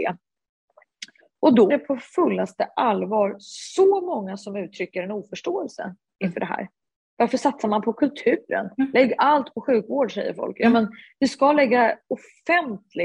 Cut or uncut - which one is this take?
cut